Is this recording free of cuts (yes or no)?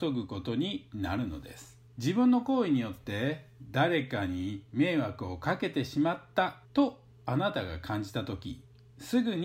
no